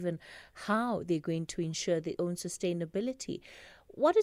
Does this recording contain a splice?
yes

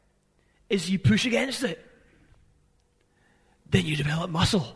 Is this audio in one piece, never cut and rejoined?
yes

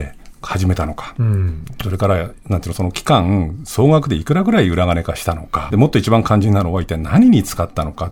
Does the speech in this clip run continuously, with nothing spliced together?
no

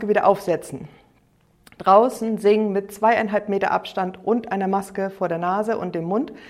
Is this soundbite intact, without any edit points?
yes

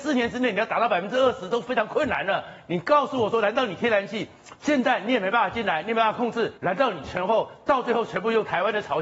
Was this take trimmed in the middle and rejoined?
yes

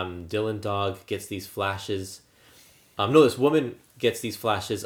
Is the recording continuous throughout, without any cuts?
yes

